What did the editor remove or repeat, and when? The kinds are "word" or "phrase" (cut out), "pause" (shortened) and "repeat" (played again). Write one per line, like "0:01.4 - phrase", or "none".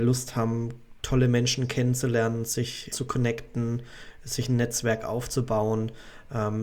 0:02.9 - word